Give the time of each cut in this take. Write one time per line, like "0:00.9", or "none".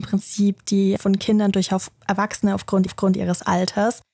0:01.0
0:02.9